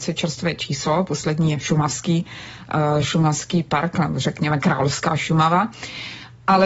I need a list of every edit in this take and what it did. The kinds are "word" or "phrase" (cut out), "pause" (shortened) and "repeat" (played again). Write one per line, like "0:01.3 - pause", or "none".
none